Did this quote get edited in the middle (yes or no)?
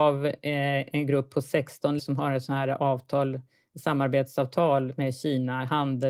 yes